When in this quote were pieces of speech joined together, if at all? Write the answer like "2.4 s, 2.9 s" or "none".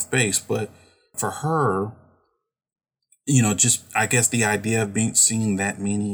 none